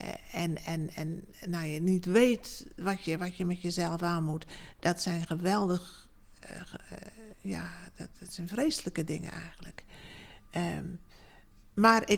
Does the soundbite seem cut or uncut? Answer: cut